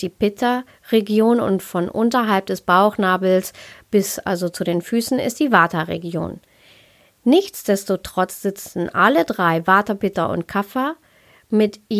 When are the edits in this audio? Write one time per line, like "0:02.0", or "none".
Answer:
none